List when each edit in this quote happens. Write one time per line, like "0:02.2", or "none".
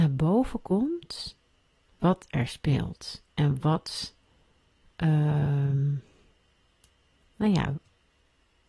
none